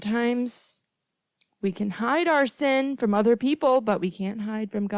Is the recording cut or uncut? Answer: uncut